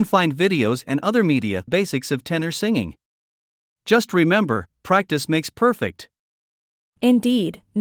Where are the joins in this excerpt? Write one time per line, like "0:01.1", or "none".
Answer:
0:01.7